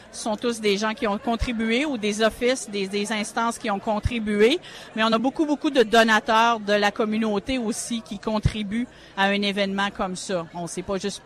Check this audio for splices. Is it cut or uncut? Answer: uncut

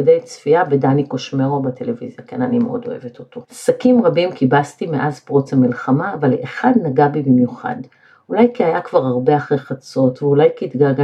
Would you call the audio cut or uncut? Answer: cut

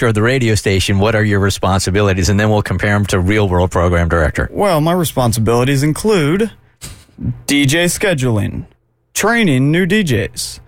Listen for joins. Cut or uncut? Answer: uncut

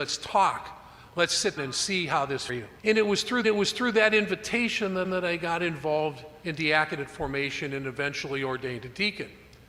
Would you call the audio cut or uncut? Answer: cut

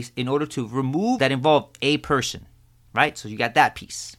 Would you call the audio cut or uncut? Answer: cut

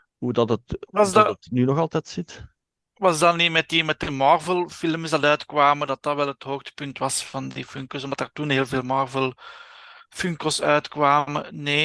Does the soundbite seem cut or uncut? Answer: uncut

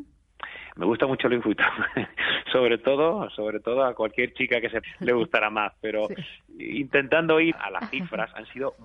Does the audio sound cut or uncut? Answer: cut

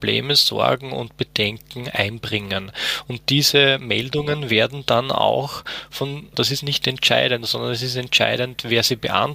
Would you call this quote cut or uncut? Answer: cut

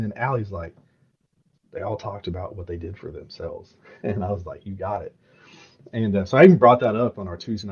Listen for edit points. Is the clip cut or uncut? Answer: uncut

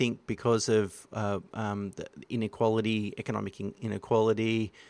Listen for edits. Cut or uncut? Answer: uncut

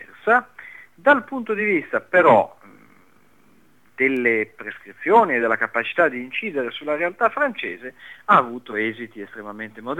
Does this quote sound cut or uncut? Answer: uncut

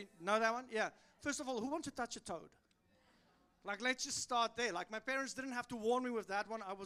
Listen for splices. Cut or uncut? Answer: uncut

